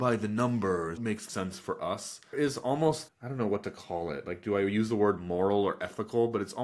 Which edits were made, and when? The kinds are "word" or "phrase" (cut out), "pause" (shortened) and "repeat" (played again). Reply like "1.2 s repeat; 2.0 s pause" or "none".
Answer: 1.0 s word; 1.3 s word; 2.3 s word; 3.1 s word